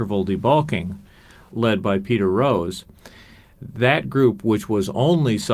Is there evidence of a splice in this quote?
no; 0 cuts

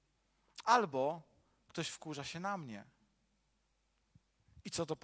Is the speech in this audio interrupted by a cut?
no; 0 cuts

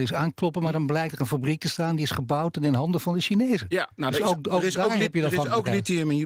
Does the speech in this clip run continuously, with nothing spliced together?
no; 1 cut; at 3.9 s

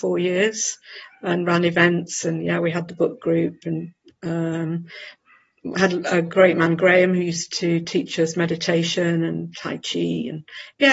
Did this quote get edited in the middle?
no; 0 cuts

